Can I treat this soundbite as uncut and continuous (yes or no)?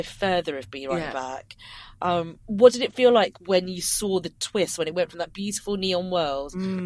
no